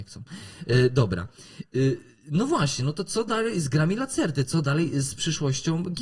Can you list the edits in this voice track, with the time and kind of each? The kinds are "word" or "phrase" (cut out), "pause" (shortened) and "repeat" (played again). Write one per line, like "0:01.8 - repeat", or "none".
none